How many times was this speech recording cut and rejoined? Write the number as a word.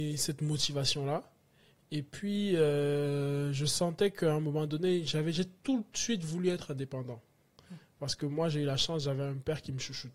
zero